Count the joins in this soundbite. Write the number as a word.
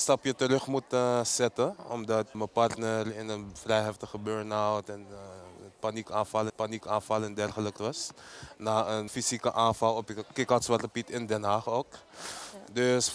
four